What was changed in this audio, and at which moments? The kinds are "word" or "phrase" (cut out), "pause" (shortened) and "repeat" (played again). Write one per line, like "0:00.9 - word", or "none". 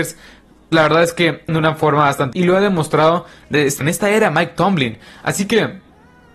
0:01.5 - word
0:02.3 - word
0:03.8 - word